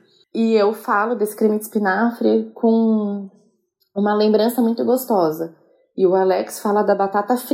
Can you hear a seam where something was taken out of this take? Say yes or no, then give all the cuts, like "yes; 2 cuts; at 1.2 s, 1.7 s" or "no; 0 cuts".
no; 0 cuts